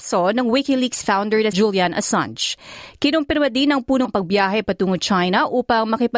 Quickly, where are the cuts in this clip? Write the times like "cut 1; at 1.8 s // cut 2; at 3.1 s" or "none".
cut 1; at 1.5 s // cut 2; at 4.0 s